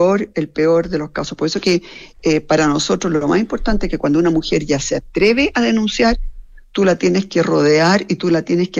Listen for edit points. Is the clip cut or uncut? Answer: uncut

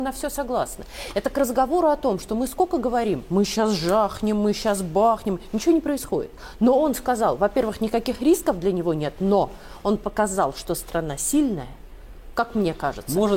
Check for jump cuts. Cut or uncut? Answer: uncut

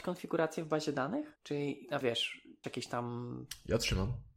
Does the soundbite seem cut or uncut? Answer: cut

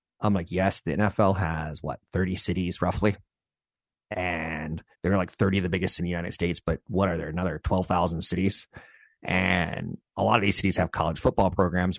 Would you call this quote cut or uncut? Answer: cut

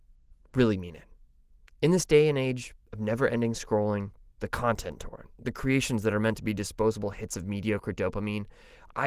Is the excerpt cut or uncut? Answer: uncut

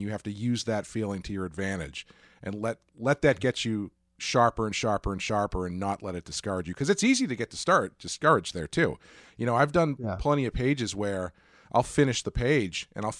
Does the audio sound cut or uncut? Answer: uncut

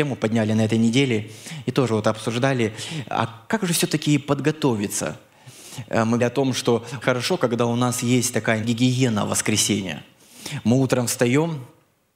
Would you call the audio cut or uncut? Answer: cut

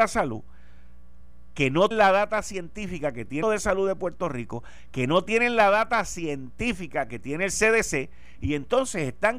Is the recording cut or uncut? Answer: cut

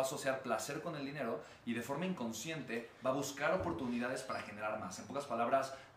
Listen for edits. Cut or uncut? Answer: uncut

